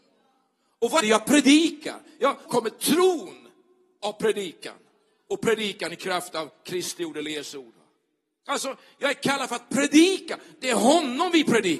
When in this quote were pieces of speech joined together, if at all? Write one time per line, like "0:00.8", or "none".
0:01.0
0:02.5